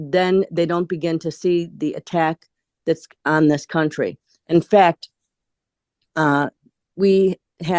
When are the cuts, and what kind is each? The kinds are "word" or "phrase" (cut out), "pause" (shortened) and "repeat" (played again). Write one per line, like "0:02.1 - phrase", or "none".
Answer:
none